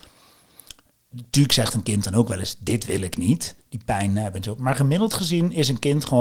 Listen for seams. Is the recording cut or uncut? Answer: cut